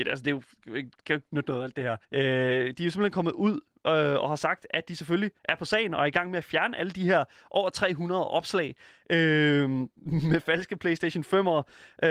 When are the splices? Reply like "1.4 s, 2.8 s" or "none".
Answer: 2.0 s, 5.4 s